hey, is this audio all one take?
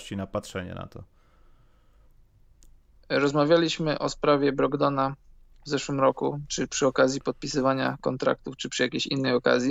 yes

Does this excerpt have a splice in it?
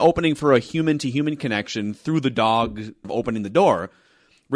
yes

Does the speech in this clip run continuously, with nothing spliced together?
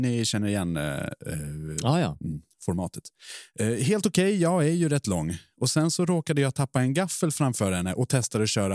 yes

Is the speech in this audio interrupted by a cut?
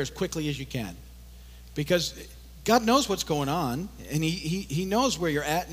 no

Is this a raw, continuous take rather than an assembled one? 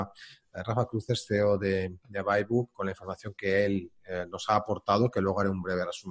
yes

